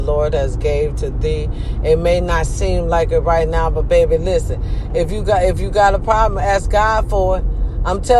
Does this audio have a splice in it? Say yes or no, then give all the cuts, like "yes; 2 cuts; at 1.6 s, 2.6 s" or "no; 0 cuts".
no; 0 cuts